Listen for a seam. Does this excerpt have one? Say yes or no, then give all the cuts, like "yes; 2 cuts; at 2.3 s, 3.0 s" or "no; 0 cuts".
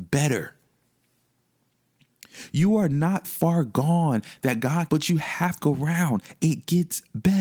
yes; 3 cuts; at 3.2 s, 4.9 s, 5.6 s